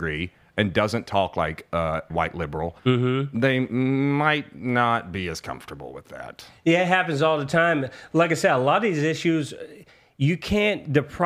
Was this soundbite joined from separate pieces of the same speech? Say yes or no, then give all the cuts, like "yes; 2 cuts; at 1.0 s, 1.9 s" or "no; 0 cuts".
yes; 2 cuts; at 2.1 s, 2.8 s